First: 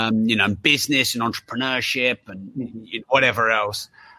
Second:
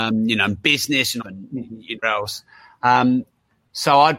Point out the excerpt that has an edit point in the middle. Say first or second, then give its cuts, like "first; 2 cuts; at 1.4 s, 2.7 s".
second; 2 cuts; at 1.2 s, 2.0 s